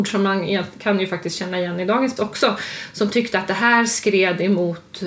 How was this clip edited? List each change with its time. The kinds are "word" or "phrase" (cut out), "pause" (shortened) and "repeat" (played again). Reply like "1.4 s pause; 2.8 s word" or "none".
2.2 s word